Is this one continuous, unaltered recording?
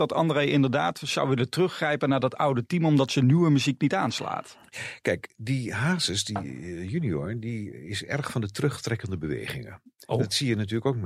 yes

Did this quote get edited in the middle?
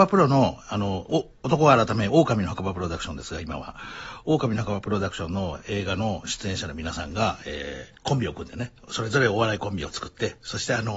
yes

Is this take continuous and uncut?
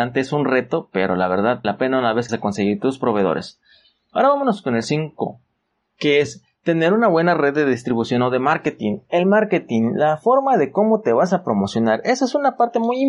no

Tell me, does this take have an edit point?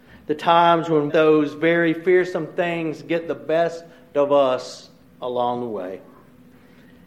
yes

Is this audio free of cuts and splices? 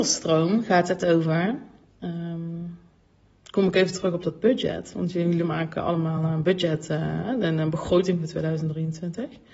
yes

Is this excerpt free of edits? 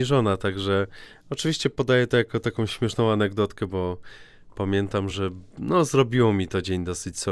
yes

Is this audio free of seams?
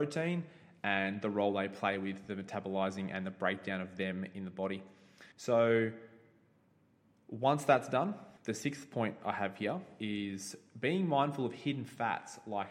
no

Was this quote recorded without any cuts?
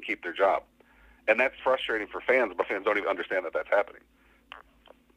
no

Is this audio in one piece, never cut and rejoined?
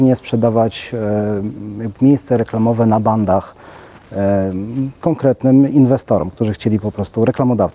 no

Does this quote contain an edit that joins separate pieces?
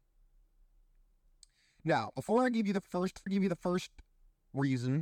yes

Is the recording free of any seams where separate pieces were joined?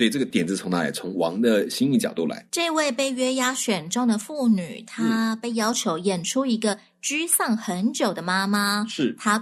no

